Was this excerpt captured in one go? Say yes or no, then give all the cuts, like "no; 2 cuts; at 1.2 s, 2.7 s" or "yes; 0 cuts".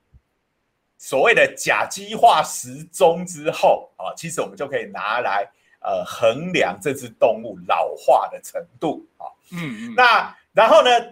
yes; 0 cuts